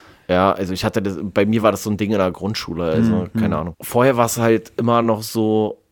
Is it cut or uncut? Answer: uncut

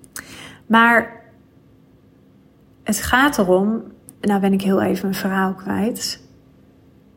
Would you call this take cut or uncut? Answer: uncut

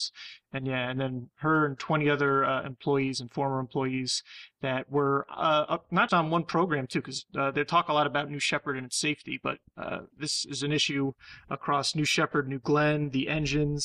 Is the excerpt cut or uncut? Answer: cut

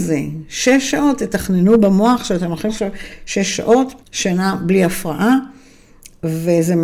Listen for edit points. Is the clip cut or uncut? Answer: cut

